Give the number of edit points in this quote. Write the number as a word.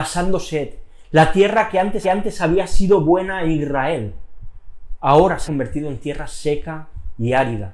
two